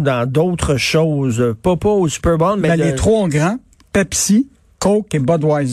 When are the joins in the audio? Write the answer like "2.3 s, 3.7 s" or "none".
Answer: none

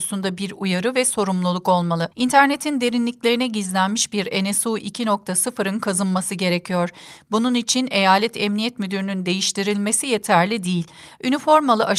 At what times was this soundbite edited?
2.1 s

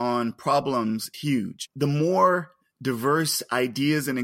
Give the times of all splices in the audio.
1.1 s

